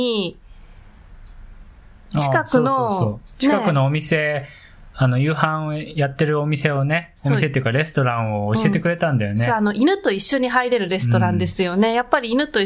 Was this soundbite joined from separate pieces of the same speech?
no; 0 cuts

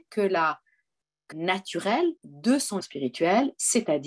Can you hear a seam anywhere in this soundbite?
yes; 3 cuts; at 1.3 s, 2.2 s, 2.8 s

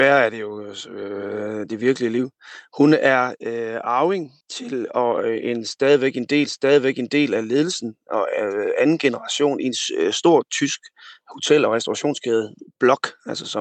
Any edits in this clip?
yes; 2 cuts; at 4.4 s, 6.5 s

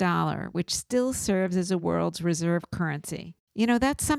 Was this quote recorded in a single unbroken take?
yes; 0 cuts

